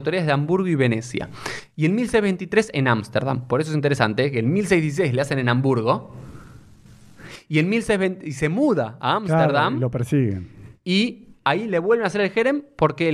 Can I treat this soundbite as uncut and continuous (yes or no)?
yes